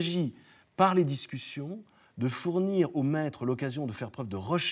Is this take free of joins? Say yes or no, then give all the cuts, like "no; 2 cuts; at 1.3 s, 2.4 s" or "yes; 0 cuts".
yes; 0 cuts